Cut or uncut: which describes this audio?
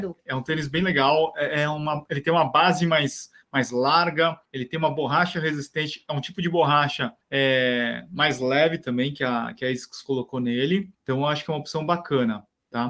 cut